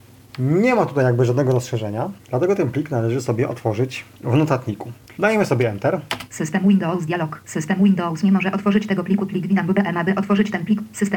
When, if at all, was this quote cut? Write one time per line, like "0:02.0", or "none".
0:05.1